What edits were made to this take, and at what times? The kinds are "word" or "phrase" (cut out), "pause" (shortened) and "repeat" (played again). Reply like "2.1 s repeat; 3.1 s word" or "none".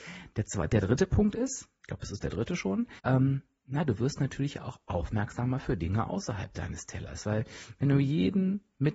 3.0 s pause